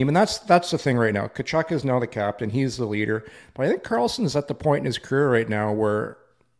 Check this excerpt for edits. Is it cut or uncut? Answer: uncut